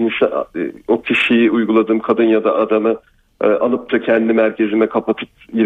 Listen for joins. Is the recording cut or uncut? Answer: uncut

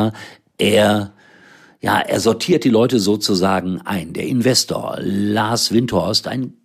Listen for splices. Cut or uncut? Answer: uncut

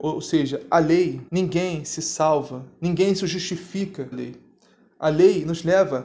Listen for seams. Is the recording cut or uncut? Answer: cut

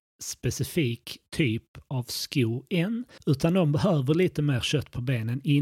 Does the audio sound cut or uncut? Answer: cut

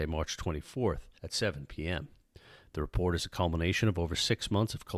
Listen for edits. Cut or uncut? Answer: cut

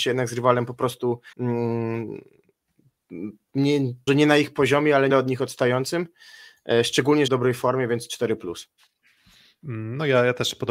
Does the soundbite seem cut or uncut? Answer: cut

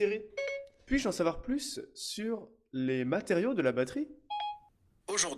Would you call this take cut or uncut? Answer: uncut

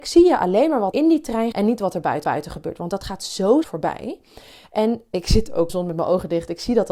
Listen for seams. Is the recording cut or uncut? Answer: cut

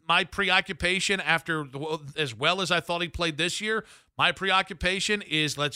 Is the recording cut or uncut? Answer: uncut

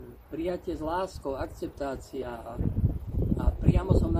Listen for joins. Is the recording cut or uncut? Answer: uncut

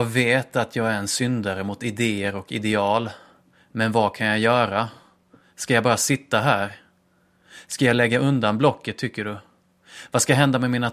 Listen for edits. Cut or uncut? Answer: uncut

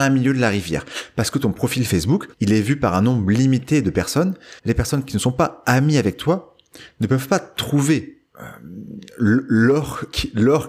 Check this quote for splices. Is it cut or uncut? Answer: cut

